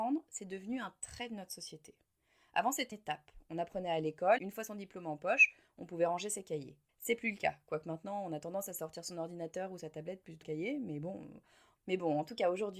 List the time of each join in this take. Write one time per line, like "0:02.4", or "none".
0:02.9
0:04.4
0:06.9
0:10.4